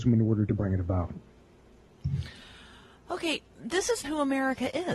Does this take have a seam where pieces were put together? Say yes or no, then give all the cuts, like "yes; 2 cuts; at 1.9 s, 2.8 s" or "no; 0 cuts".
yes; 2 cuts; at 3.5 s, 4.0 s